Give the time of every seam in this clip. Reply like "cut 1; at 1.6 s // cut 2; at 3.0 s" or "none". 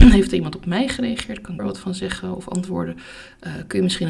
cut 1; at 1.6 s

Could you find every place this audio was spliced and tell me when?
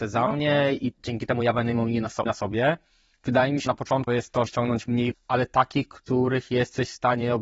cut 1; at 0.9 s // cut 2; at 2.2 s // cut 3; at 3.7 s // cut 4; at 4.1 s // cut 5; at 4.5 s // cut 6; at 5.1 s

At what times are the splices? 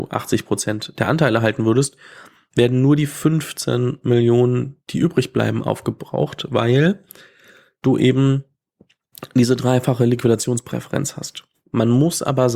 none

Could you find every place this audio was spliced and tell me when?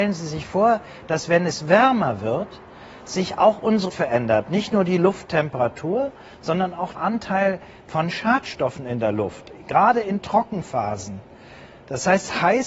cut 1; at 3.9 s // cut 2; at 6.9 s

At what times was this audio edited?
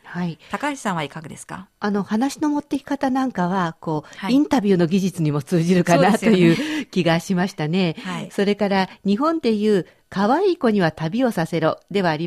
none

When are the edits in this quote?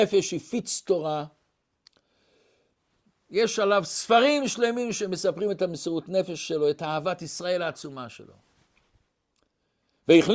none

